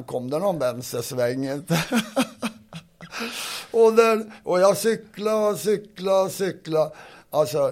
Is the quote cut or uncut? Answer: uncut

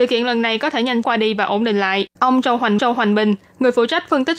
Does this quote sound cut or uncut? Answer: cut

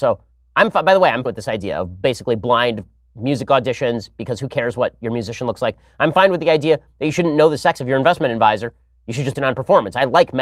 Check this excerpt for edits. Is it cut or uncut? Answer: cut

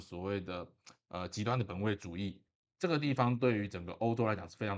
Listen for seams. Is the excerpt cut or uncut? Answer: uncut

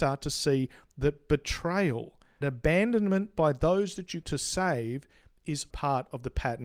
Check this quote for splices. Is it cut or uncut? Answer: cut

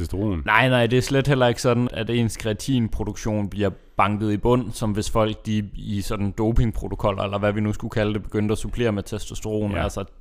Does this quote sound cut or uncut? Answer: cut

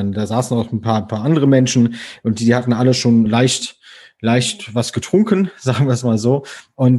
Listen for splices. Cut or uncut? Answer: cut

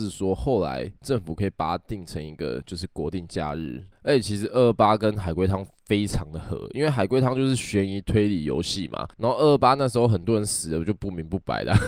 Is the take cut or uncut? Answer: cut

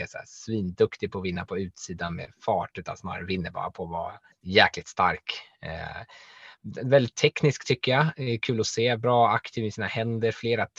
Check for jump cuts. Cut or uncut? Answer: cut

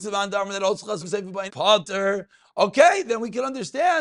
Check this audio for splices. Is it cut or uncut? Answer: cut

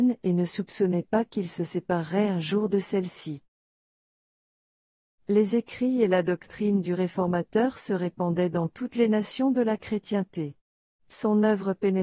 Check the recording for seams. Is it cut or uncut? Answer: uncut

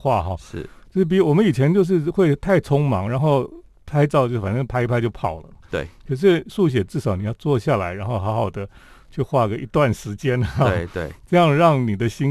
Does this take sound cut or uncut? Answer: uncut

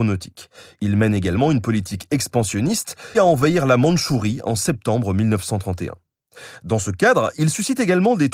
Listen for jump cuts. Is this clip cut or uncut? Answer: cut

